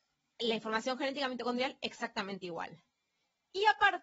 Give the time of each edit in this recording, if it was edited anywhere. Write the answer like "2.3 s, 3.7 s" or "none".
none